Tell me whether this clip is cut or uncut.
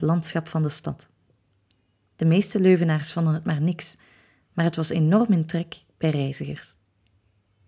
uncut